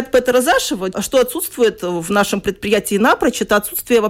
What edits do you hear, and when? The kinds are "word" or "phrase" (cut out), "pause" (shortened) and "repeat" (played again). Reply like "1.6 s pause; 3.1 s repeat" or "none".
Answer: 0.9 s word